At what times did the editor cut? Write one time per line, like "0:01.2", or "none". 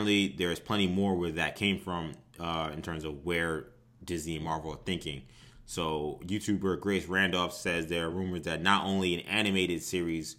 none